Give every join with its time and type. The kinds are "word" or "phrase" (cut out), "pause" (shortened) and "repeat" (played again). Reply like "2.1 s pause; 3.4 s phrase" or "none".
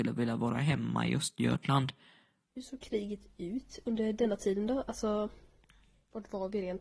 none